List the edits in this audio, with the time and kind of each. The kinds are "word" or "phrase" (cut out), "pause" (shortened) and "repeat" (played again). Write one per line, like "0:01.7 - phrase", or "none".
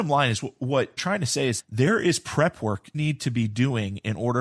0:01.0 - phrase
0:01.6 - word
0:02.9 - word